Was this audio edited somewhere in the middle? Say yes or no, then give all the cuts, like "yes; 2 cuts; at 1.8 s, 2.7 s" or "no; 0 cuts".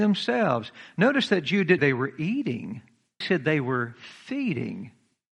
yes; 2 cuts; at 1.8 s, 3.2 s